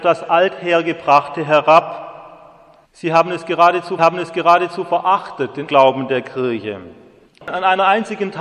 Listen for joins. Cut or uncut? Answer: cut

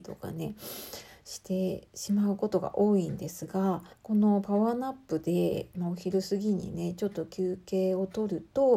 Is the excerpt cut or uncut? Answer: cut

